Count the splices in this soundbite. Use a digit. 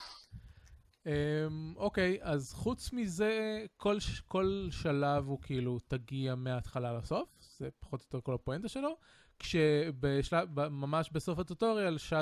0